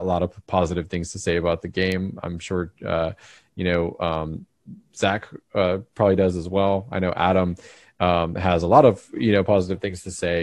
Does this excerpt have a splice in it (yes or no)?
no